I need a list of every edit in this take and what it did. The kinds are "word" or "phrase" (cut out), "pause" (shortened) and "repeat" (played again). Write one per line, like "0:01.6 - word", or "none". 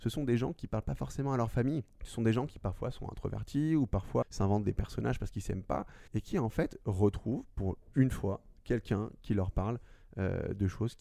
0:01.9 - pause
0:04.2 - word
0:06.1 - pause